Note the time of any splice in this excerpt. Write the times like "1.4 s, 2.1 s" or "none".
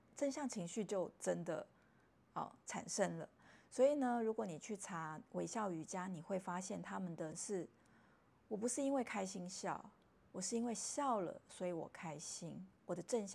7.3 s